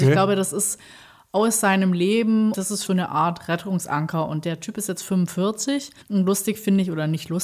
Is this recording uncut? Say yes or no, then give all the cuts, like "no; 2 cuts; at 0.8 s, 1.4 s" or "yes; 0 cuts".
no; 3 cuts; at 2.5 s, 2.9 s, 6.0 s